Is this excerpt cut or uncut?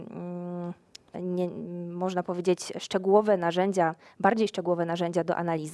cut